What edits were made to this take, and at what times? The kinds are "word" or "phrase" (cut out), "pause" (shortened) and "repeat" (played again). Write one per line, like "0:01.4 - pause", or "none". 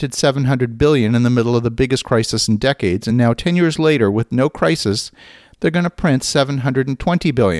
none